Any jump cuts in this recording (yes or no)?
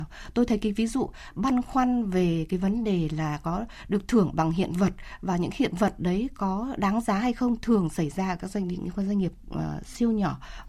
no